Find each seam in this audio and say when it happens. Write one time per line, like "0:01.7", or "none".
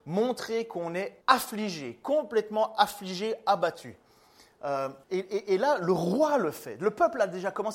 0:01.2
0:05.0